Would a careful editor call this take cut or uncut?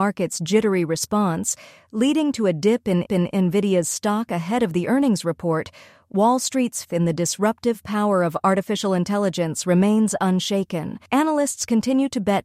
cut